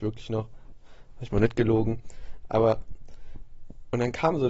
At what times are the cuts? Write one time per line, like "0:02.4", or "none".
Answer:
none